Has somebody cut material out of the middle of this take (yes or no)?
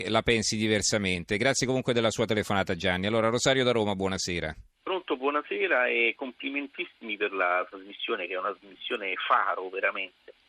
no